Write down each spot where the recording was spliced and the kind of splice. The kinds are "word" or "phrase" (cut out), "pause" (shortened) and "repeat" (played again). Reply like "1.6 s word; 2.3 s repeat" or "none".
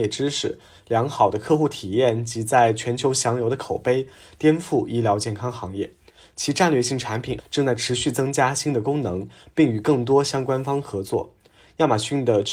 7.4 s word